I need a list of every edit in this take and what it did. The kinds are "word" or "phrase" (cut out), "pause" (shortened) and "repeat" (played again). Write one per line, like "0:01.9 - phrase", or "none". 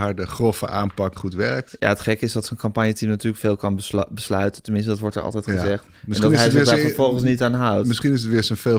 0:01.2 - word

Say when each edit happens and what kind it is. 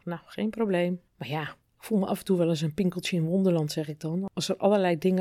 0:01.1 - pause

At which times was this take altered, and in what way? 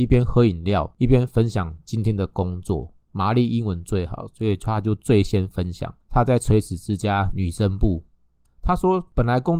none

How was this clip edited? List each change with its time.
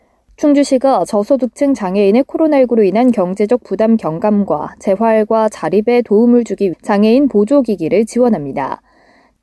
0:06.7 - word

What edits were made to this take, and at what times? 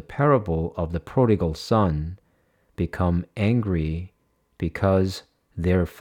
none

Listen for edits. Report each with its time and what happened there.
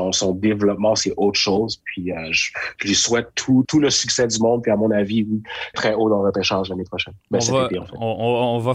0:03.6 - word
0:05.7 - word
0:07.2 - pause

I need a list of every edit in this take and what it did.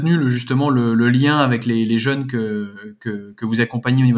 none

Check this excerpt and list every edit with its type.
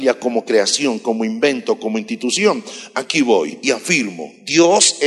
none

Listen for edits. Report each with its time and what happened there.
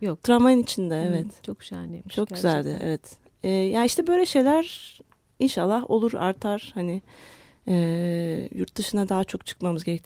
none

